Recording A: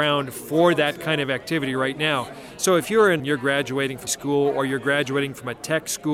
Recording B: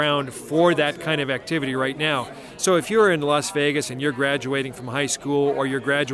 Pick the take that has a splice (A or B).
A